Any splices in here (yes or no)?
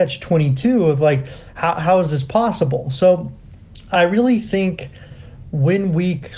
no